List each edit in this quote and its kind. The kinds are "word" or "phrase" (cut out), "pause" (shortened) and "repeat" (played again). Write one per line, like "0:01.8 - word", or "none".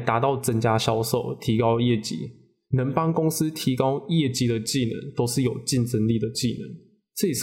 none